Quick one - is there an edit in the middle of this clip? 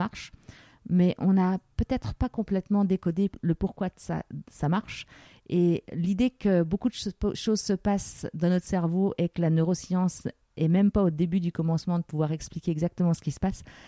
no; 0 cuts

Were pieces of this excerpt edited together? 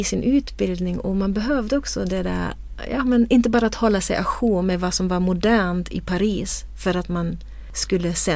no; 0 cuts

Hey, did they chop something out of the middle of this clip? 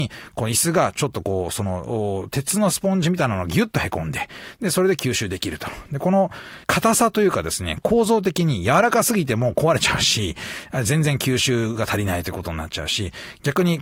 yes; 1 cut; at 6.6 s

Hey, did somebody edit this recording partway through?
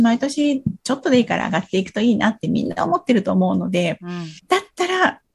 yes; 1 cut; at 4.4 s

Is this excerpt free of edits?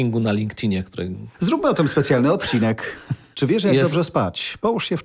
yes; 0 cuts

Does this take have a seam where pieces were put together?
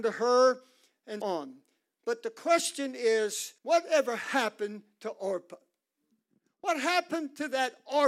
yes; 2 cuts; at 1.2 s, 3.6 s

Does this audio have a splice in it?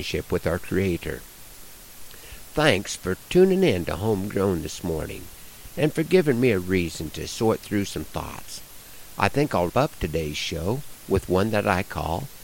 yes; 1 cut; at 9.7 s

